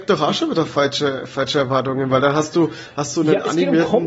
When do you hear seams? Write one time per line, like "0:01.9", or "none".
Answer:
none